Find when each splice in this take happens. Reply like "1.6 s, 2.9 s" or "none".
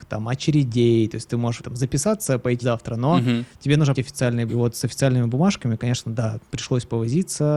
1.6 s, 2.6 s, 3.9 s, 4.5 s, 6.5 s